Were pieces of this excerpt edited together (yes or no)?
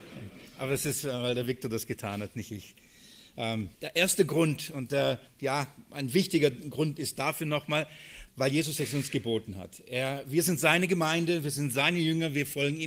yes